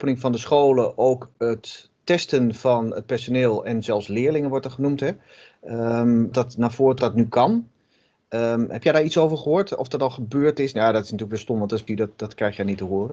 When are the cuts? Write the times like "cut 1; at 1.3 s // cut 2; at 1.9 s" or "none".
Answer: cut 1; at 6.3 s // cut 2; at 7.0 s // cut 3; at 11.9 s